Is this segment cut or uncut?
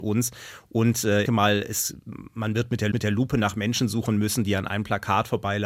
cut